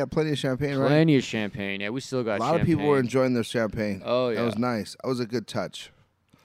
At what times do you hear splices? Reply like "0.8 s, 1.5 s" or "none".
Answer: 5.0 s